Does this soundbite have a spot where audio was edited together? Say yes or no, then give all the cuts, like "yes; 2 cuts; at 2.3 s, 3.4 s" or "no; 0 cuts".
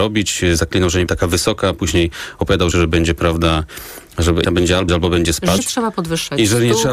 yes; 5 cuts; at 1.1 s, 2.7 s, 4.4 s, 4.9 s, 5.6 s